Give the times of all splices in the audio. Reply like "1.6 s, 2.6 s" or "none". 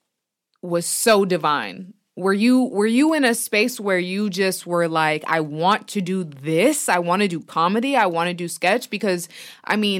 none